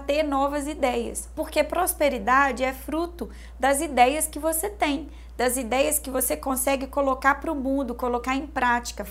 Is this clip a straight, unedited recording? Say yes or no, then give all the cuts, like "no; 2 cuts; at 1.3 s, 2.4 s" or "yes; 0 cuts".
yes; 0 cuts